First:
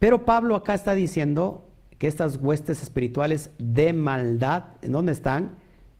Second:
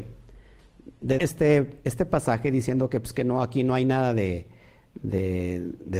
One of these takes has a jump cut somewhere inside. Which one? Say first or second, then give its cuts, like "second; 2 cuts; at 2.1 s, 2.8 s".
second; 1 cut; at 1.2 s